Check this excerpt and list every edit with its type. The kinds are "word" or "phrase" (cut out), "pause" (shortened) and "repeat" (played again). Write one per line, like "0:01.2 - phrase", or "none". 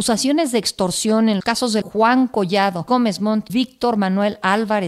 0:01.4 - word
0:01.8 - word
0:02.9 - phrase
0:03.5 - word